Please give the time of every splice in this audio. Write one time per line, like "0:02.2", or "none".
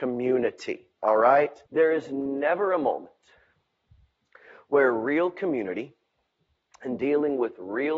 0:01.7